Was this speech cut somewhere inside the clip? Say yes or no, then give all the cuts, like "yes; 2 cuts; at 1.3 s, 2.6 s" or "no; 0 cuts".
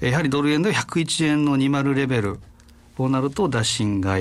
no; 0 cuts